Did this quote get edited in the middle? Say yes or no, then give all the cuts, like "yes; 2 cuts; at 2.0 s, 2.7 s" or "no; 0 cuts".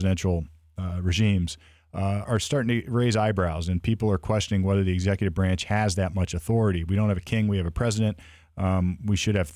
yes; 1 cut; at 2.3 s